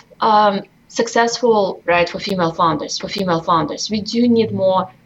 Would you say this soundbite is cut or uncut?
cut